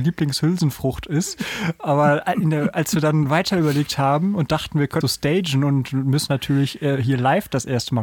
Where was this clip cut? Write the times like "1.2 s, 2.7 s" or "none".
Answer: 5.0 s, 6.3 s